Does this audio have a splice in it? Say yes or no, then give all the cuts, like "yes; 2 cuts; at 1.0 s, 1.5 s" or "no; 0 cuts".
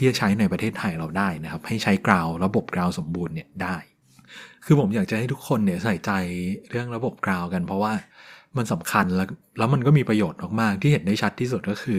no; 0 cuts